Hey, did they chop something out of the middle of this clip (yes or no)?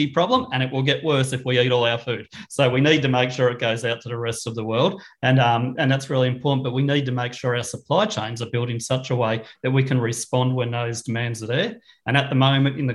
no